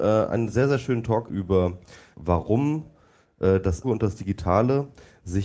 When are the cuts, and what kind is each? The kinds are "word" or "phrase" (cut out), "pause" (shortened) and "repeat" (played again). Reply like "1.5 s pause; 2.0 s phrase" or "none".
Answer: 1.3 s word; 2.1 s word; 3.8 s word